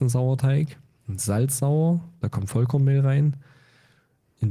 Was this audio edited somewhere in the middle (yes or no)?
no